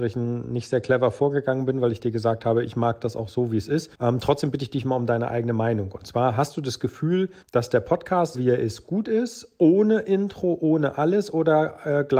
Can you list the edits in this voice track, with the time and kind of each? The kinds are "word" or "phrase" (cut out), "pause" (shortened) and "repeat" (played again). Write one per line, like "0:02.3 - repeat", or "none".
0:03.9 - pause
0:07.4 - pause
0:08.3 - word

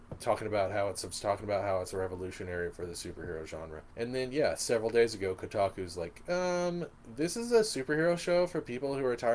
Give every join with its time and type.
0:01.1 - phrase
0:03.9 - pause

